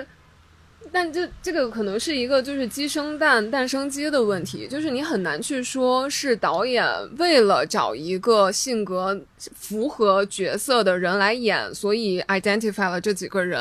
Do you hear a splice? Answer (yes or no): yes